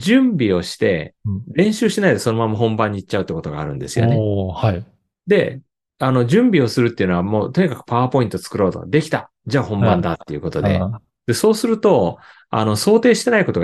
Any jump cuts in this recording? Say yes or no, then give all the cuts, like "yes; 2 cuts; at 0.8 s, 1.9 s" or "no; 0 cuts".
no; 0 cuts